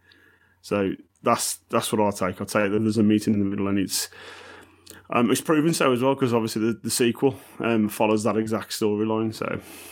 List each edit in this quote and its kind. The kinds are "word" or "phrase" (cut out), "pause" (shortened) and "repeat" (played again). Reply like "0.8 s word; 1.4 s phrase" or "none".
none